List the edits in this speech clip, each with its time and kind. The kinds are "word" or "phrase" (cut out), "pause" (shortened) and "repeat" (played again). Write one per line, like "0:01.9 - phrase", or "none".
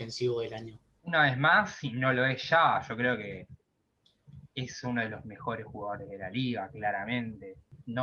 none